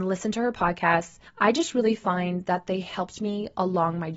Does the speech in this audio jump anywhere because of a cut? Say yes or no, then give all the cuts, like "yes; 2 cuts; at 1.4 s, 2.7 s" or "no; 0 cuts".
yes; 1 cut; at 1.3 s